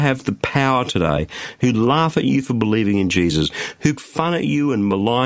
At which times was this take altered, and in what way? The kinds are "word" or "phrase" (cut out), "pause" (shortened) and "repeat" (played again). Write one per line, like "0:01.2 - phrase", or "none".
0:04.0 - word